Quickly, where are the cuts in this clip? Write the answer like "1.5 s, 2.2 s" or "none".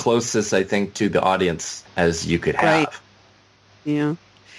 1.9 s